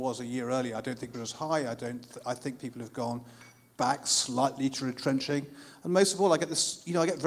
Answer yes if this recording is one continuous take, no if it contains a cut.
no